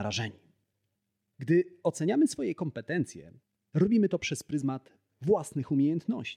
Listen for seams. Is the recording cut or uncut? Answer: uncut